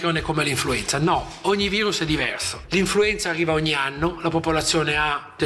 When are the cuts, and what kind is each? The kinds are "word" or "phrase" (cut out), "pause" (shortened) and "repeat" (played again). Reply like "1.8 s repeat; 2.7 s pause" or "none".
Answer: none